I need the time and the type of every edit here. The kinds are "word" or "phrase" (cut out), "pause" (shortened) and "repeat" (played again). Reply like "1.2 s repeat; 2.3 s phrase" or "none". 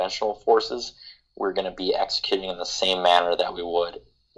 none